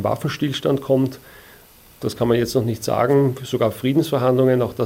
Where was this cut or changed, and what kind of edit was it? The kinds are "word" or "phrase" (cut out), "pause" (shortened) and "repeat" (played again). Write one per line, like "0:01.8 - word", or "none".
none